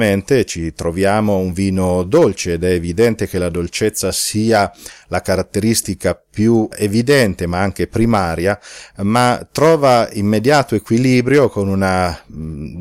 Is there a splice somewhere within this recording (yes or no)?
no